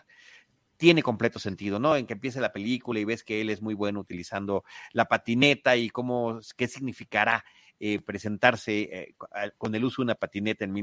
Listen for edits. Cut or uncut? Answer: uncut